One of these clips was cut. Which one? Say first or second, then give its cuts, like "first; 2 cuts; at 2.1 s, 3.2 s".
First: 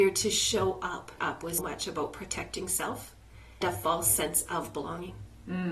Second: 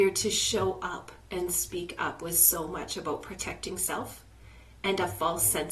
first; 3 cuts; at 1.2 s, 1.6 s, 3.6 s